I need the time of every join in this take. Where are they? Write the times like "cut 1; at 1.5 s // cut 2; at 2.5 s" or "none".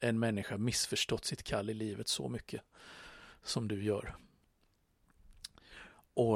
none